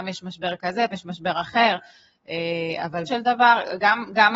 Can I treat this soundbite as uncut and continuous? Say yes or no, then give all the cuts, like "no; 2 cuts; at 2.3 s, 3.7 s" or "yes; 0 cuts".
no; 2 cuts; at 0.9 s, 3.1 s